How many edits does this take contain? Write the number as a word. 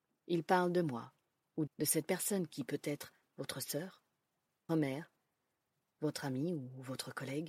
two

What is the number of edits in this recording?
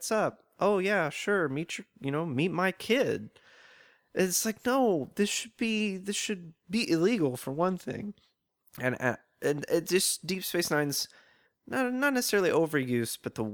zero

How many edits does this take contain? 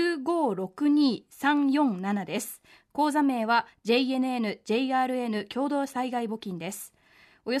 zero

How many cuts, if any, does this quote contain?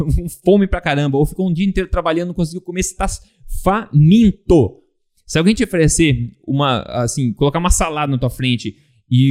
zero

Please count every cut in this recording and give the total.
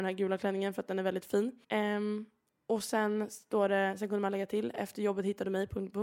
one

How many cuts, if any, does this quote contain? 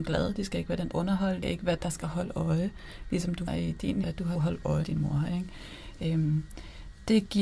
seven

